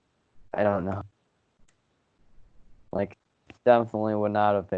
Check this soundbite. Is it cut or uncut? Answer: cut